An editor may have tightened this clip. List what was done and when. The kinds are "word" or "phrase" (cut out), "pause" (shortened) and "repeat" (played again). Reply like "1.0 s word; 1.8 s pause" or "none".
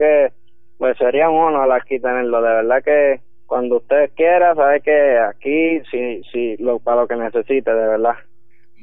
none